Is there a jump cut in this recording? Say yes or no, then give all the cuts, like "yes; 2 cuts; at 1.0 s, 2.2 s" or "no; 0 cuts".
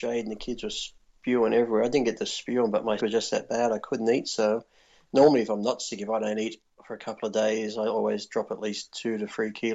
yes; 1 cut; at 3.0 s